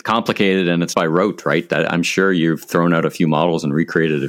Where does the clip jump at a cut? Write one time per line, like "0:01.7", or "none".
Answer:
0:00.9